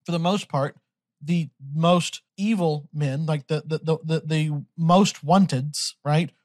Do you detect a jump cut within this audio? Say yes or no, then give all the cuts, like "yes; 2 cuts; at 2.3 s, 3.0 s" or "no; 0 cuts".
yes; 1 cut; at 2.3 s